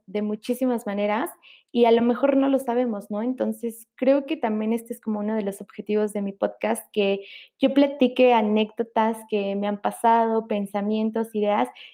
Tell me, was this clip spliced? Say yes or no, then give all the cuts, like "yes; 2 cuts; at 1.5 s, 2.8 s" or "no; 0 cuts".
no; 0 cuts